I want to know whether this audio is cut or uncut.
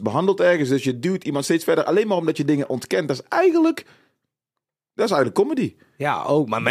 uncut